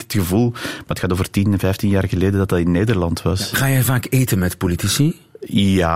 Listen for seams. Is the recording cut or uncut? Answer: uncut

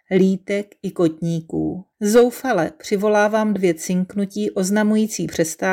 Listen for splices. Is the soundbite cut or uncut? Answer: cut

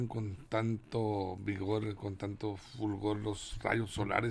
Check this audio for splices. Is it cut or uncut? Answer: uncut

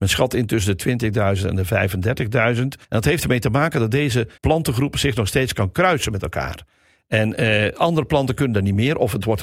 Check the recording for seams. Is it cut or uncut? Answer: cut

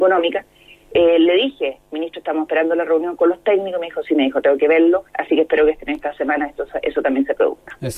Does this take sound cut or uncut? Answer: cut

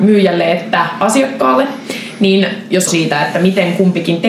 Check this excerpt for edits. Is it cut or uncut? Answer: cut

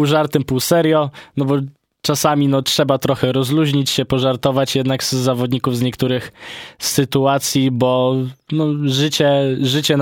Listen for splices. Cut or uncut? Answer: uncut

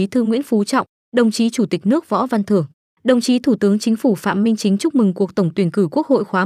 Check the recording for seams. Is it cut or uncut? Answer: uncut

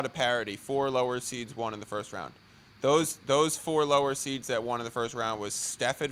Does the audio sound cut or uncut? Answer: uncut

